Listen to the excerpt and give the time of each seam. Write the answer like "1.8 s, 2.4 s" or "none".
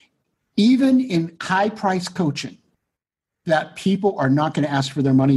none